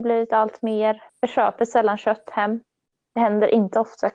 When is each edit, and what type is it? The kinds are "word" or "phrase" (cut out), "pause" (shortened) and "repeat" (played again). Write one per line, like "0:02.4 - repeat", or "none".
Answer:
0:01.1 - pause